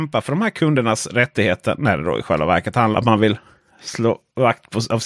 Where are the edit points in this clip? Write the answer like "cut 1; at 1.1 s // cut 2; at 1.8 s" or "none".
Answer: cut 1; at 2.9 s